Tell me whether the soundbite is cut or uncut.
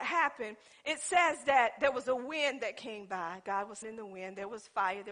cut